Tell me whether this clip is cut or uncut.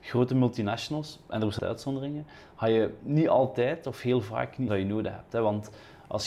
cut